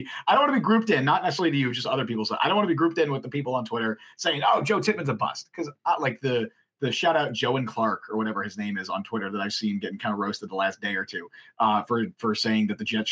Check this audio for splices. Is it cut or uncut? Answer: uncut